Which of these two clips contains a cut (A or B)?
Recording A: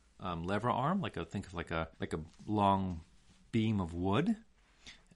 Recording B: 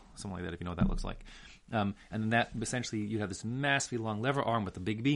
A